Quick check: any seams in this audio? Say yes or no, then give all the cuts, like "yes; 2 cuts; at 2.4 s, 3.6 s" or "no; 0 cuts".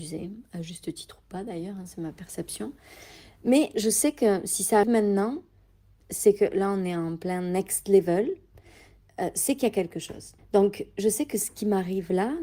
yes; 3 cuts; at 3.7 s, 4.8 s, 10.4 s